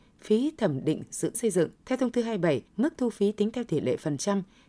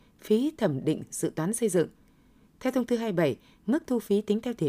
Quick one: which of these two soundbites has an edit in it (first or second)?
first